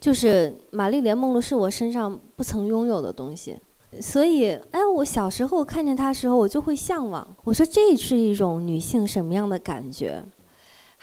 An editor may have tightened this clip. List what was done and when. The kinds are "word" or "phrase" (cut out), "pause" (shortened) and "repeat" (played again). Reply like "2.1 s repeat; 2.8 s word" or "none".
3.8 s pause; 7.4 s pause